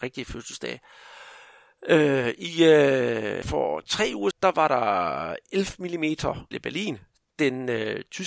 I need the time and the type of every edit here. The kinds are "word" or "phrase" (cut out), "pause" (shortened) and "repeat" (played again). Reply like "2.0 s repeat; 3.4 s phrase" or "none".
3.4 s word; 4.3 s word; 6.5 s word